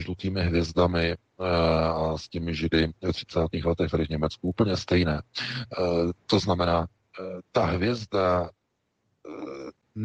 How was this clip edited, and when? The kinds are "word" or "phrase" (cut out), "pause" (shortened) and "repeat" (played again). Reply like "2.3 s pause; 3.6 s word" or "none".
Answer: none

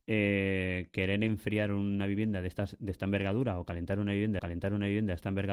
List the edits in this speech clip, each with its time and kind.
4.4 s repeat

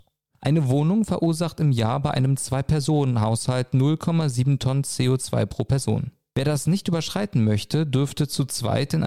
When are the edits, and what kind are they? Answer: none

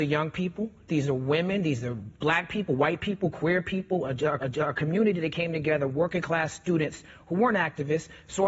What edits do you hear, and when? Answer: 4.4 s repeat

